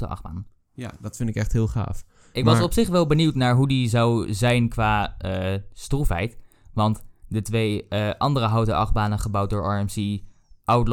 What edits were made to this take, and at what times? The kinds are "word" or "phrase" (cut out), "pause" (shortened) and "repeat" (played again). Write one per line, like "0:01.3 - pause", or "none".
none